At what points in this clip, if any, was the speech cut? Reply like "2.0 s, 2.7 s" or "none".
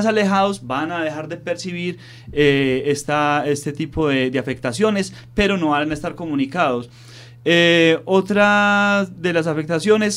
none